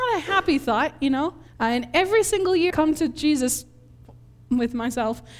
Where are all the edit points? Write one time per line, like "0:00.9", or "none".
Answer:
0:01.5
0:02.7